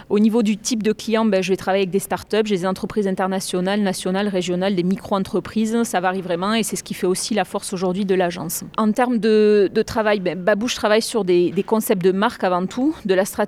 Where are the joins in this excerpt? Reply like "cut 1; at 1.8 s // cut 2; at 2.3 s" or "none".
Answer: cut 1; at 8.7 s

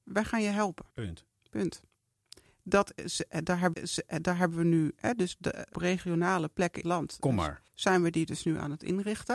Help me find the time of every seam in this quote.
cut 1; at 0.9 s // cut 2; at 3.7 s // cut 3; at 5.7 s // cut 4; at 6.8 s // cut 5; at 7.7 s

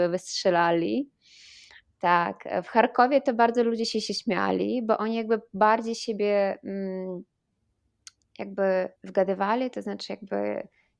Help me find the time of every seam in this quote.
cut 1; at 9.0 s

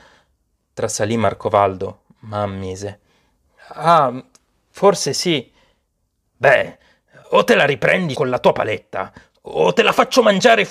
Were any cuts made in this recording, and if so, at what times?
cut 1; at 8.1 s

